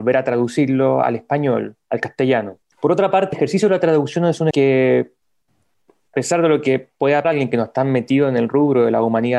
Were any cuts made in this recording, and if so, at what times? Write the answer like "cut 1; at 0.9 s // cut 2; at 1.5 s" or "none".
cut 1; at 1.8 s // cut 2; at 2.7 s // cut 3; at 3.3 s // cut 4; at 4.5 s // cut 5; at 6.1 s // cut 6; at 7.2 s